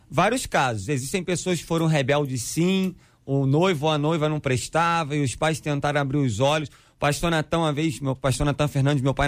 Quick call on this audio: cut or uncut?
uncut